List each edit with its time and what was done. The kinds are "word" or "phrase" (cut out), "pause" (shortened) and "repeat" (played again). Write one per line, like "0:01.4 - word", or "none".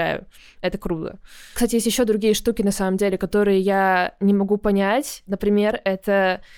none